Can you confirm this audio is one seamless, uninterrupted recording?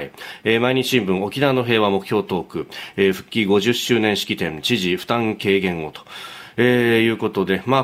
yes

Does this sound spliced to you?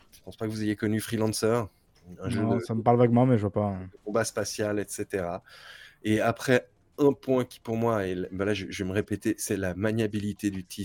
no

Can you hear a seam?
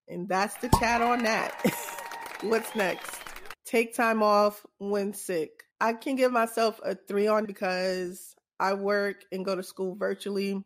yes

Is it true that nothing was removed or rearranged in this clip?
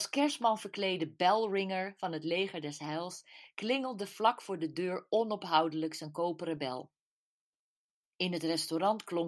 yes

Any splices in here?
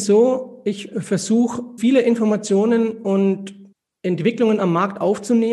yes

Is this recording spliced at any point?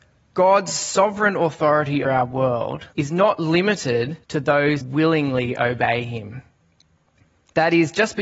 yes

